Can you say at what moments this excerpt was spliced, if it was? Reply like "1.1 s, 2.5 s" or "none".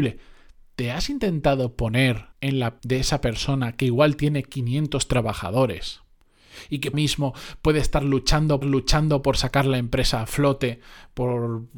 2.3 s, 2.8 s, 6.9 s, 8.6 s